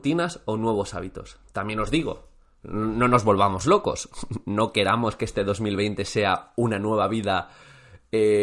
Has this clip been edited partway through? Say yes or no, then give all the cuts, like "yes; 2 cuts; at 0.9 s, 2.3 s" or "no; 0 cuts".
no; 0 cuts